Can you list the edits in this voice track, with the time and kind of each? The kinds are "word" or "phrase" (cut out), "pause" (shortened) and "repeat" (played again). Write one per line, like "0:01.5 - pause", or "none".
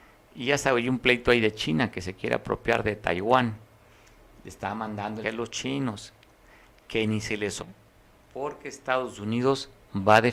0:05.2 - word
0:07.6 - word